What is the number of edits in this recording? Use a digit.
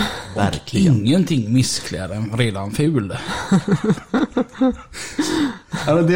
0